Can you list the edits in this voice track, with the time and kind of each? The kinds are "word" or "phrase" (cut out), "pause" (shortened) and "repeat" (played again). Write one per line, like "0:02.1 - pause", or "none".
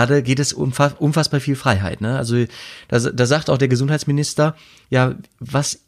none